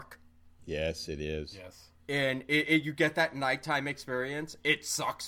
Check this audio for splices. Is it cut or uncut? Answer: uncut